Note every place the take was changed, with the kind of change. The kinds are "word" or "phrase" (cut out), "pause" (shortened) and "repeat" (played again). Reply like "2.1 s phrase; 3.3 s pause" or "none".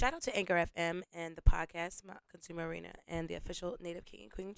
2.2 s word